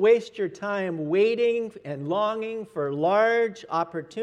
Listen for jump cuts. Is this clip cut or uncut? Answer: uncut